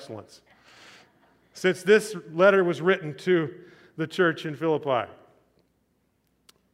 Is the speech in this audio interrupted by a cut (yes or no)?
no